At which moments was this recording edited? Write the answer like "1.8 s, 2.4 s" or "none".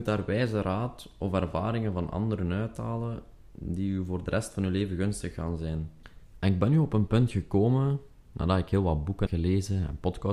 9.3 s